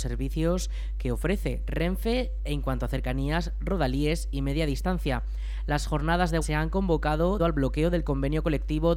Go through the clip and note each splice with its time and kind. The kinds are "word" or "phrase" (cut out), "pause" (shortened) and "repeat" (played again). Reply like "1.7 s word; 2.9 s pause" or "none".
6.4 s word; 7.4 s word